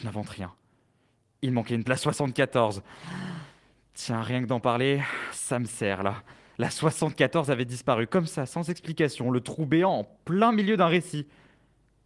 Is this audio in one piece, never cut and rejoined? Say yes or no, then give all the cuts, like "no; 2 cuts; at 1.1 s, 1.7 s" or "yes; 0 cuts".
no; 1 cut; at 1.9 s